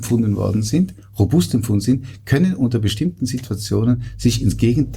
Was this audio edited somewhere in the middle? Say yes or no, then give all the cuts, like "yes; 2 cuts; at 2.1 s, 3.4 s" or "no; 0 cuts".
no; 0 cuts